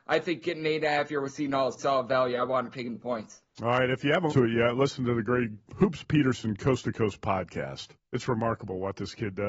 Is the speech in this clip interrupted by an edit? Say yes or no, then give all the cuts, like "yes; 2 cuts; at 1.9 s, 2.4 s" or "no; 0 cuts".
yes; 4 cuts; at 1.8 s, 4.3 s, 5.6 s, 8.0 s